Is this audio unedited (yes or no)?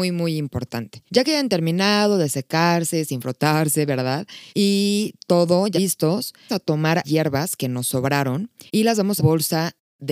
no